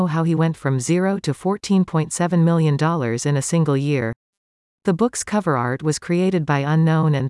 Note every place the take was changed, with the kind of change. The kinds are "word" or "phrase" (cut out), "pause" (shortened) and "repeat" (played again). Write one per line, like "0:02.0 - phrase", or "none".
none